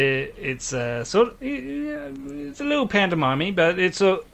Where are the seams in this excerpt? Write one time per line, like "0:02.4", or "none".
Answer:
none